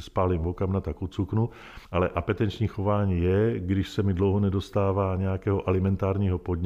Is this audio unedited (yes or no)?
no